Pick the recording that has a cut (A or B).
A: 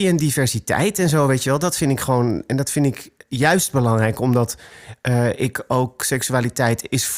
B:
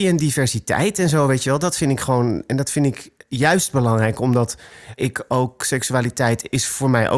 B